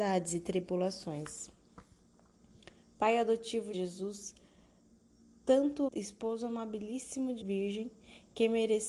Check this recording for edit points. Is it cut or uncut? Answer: cut